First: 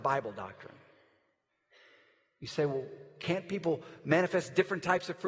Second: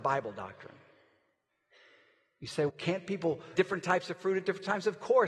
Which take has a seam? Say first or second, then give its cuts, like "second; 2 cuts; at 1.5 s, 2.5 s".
second; 2 cuts; at 2.7 s, 3.5 s